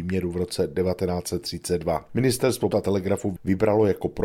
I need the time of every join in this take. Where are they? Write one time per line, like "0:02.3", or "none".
0:02.7